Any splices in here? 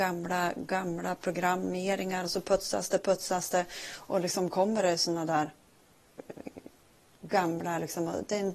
no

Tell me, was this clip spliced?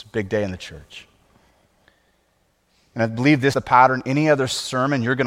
yes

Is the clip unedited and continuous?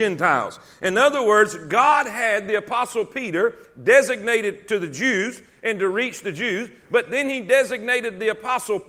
yes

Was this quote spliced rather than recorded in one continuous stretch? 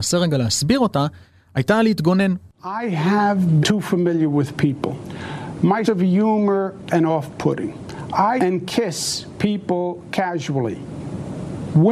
yes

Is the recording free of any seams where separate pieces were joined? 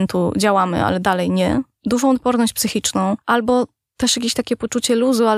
yes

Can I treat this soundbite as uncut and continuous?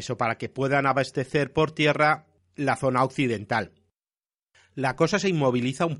yes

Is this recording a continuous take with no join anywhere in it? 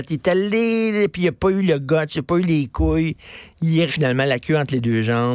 no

